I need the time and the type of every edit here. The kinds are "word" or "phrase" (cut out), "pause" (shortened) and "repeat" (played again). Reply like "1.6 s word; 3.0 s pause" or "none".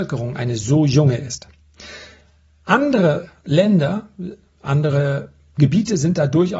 none